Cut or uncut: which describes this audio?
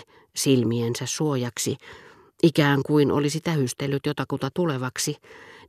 uncut